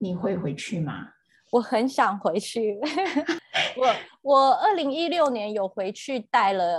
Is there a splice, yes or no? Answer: no